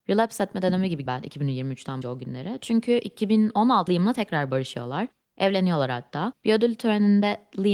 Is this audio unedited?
no; 3 cuts; at 1.1 s, 2.0 s, 3.9 s

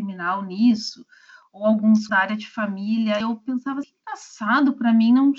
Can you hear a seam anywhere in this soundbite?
yes; 3 cuts; at 2.1 s, 3.2 s, 3.8 s

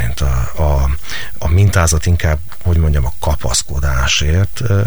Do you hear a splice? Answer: yes; 2 cuts; at 1.4 s, 2.8 s

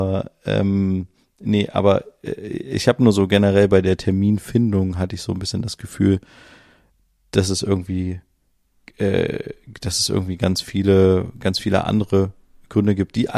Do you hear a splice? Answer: no; 0 cuts

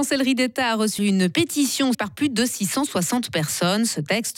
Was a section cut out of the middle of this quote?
yes; 2 cuts; at 1.0 s, 1.9 s

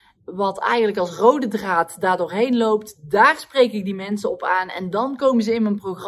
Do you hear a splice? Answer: no; 0 cuts

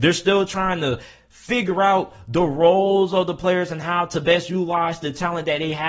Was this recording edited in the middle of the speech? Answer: no; 0 cuts

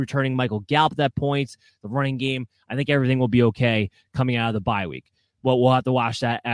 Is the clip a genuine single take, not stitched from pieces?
yes; 0 cuts

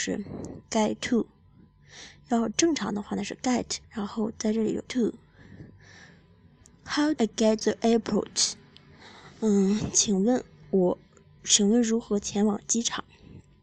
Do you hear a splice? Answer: yes; 4 cuts; at 3.8 s, 4.8 s, 7.2 s, 7.6 s

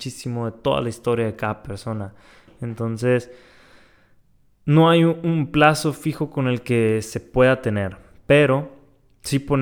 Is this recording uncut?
yes; 0 cuts

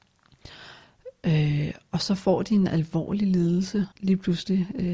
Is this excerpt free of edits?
no; 1 cut; at 3.9 s

